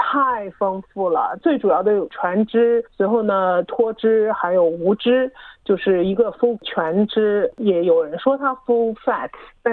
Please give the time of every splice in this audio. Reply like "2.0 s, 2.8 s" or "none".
2.9 s, 6.6 s